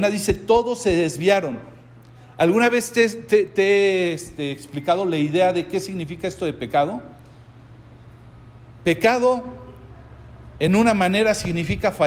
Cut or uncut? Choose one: uncut